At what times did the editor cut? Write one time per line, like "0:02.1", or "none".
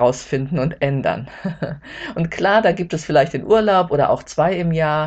none